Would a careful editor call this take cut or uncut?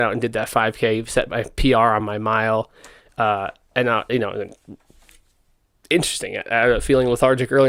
uncut